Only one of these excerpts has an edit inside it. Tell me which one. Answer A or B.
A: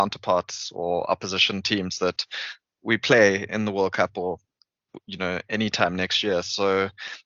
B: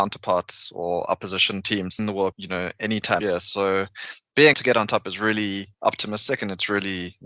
B